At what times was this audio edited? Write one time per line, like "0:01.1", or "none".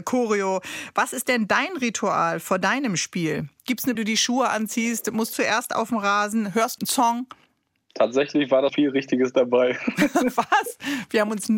0:03.9
0:05.3
0:06.8
0:08.7